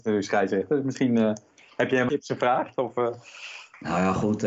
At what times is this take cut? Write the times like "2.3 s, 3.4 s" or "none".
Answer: 2.1 s